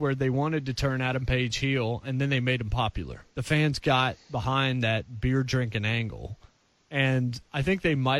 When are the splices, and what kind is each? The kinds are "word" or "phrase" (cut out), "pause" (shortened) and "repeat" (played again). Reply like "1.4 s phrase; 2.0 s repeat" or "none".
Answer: 3.3 s pause